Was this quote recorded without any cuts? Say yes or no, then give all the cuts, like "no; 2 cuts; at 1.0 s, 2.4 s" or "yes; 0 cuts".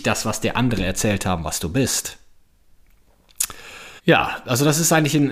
no; 1 cut; at 4.0 s